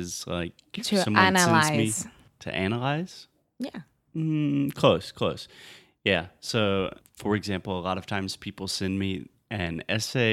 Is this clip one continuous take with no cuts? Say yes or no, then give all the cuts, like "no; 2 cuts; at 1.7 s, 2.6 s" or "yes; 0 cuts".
yes; 0 cuts